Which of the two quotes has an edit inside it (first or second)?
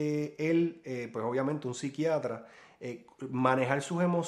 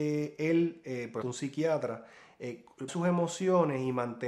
second